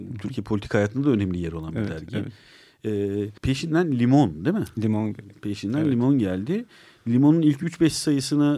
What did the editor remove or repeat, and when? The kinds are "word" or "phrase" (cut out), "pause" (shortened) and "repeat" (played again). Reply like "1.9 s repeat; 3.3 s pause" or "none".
3.4 s pause